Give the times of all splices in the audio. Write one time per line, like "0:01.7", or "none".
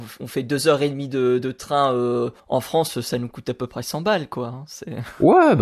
0:02.4